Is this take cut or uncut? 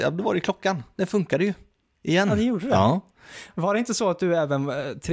uncut